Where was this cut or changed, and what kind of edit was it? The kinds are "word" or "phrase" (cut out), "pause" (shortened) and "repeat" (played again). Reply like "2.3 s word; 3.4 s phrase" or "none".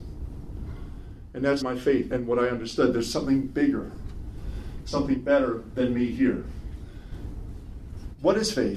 1.6 s word; 2.1 s word